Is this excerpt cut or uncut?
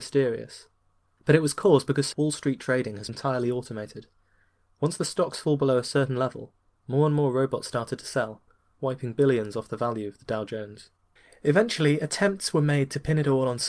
cut